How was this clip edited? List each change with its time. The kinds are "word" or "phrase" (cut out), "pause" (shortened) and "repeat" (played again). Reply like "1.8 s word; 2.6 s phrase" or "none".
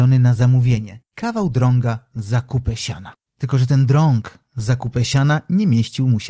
1.1 s pause; 3.3 s pause